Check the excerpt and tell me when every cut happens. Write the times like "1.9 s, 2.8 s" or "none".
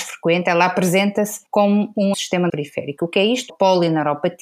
1.5 s, 2.1 s, 2.5 s, 3.5 s